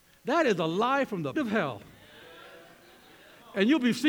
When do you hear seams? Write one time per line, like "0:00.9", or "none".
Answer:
0:01.4

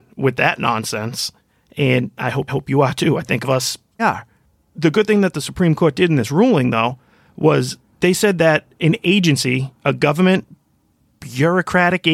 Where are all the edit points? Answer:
0:02.5
0:03.4
0:04.0
0:09.8

